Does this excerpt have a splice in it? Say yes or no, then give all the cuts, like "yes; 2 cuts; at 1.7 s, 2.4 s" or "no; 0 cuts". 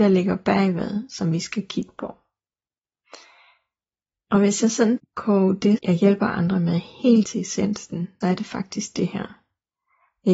yes; 4 cuts; at 5.0 s, 5.8 s, 7.2 s, 8.2 s